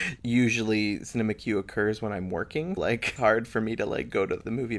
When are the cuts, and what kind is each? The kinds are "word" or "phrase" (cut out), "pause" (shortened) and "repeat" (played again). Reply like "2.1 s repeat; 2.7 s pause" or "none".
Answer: 2.8 s word; 3.2 s word